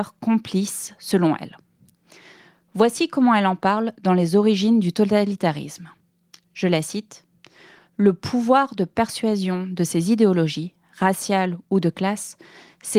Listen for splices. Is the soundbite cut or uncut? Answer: uncut